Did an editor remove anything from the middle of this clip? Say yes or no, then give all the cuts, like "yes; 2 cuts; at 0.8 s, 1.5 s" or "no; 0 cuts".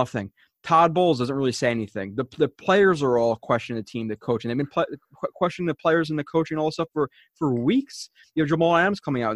no; 0 cuts